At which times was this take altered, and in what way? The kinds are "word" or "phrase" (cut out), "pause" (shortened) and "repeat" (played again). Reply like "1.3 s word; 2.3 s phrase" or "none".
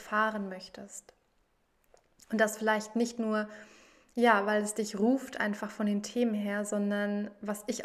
none

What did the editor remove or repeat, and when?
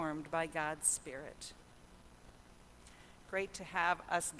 3.3 s word

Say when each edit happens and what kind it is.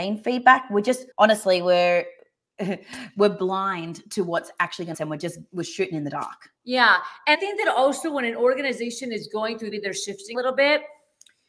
1.1 s pause; 4.9 s phrase; 6.6 s pause; 7.3 s word; 9.7 s phrase; 10.3 s word

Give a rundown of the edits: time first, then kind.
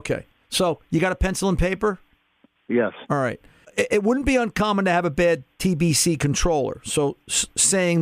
3.6 s pause

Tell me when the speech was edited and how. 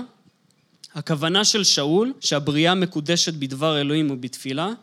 2.2 s pause

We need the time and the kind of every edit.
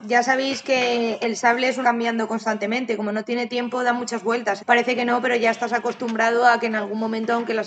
1.8 s phrase; 4.6 s word

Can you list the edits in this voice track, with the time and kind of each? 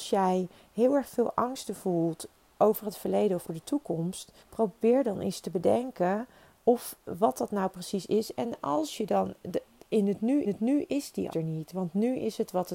3.5 s word; 4.4 s pause; 7.0 s word; 10.5 s repeat; 11.3 s word

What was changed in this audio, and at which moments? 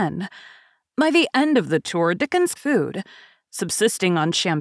2.6 s phrase

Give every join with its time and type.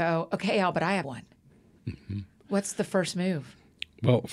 1.0 s word

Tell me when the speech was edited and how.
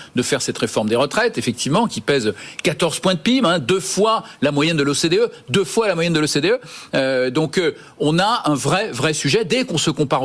none

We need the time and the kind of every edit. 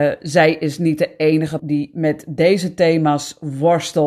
1.6 s word

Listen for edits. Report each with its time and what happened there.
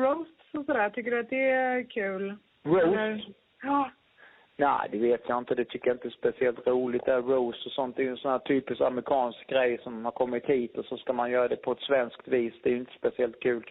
none

